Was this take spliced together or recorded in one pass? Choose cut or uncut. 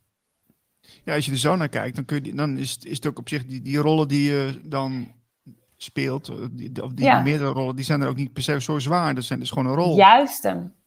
uncut